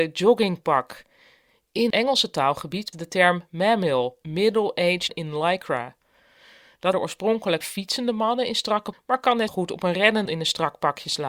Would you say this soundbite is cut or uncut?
cut